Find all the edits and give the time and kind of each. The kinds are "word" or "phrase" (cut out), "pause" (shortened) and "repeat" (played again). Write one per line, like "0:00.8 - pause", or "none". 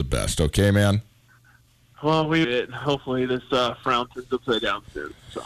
0:02.4 - word